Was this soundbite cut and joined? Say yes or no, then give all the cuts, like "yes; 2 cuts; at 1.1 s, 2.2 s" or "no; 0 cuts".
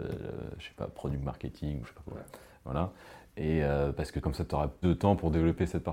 yes; 3 cuts; at 1.8 s, 4.2 s, 4.8 s